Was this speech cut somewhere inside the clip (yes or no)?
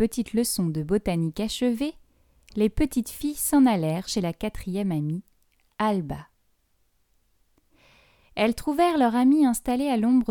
no